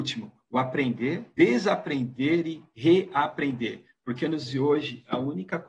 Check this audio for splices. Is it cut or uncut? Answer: cut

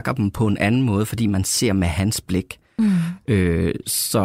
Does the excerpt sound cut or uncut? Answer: uncut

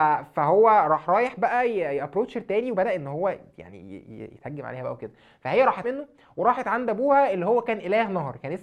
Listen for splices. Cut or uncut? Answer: cut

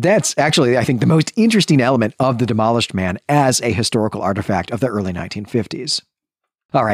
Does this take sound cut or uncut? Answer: uncut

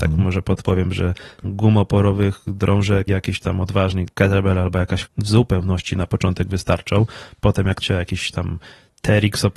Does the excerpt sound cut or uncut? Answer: cut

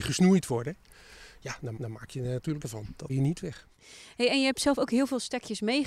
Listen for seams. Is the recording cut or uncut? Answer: cut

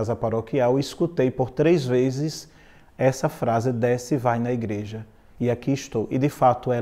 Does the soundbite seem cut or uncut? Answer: uncut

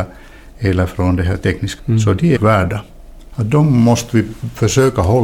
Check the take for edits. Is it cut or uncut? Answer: cut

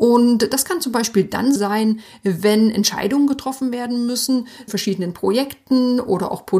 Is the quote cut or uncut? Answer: cut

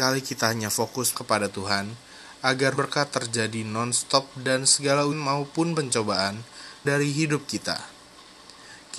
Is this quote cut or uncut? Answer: cut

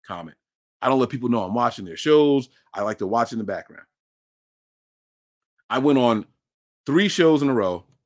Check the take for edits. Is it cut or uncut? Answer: uncut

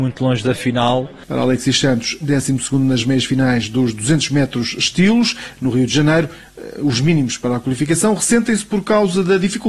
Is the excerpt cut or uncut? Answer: uncut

